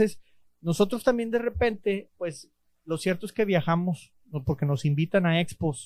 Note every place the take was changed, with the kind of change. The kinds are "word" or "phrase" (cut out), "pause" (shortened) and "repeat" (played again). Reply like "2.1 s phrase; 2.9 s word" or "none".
none